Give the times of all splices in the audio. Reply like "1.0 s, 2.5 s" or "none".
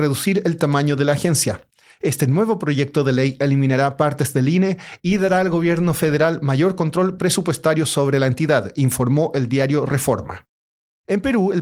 none